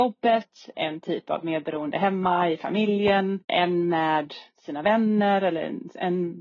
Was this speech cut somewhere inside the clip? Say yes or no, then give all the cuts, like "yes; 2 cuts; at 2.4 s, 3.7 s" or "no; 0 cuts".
yes; 1 cut; at 3.4 s